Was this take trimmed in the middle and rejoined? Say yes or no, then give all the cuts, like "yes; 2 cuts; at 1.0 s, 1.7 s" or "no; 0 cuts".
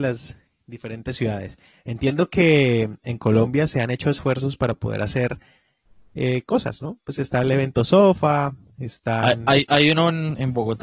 no; 0 cuts